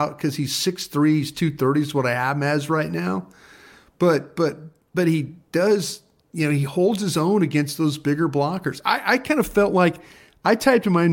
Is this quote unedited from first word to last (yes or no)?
yes